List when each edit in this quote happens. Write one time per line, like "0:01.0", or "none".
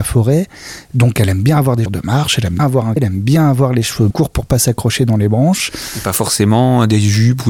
0:01.9
0:02.6
0:03.0
0:04.1